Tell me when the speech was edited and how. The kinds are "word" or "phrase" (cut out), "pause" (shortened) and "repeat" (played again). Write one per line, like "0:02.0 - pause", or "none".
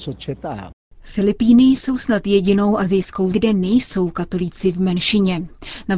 0:03.3 - word